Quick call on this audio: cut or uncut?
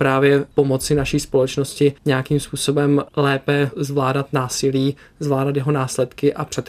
cut